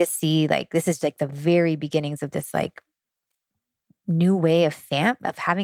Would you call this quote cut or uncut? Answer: uncut